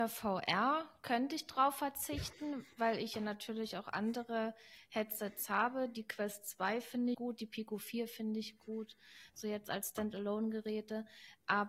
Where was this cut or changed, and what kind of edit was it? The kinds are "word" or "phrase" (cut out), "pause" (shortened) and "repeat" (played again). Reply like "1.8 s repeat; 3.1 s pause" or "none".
7.1 s word